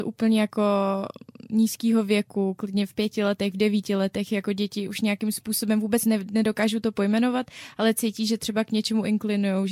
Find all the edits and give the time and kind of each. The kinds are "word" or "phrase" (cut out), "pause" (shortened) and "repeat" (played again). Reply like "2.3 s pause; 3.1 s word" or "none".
none